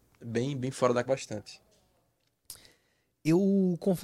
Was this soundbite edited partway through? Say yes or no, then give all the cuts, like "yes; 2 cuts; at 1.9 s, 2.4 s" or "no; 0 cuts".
yes; 1 cut; at 1.0 s